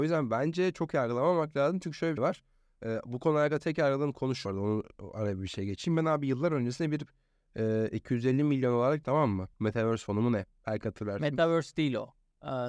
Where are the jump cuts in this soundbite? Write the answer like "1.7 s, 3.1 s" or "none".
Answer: 2.2 s, 4.5 s, 9.0 s, 9.5 s